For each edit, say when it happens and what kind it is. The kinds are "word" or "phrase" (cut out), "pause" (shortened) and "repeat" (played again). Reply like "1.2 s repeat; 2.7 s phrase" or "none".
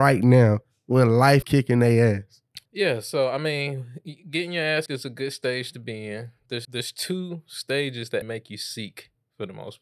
1.4 s word; 2.7 s pause; 4.9 s word; 6.6 s word; 8.2 s word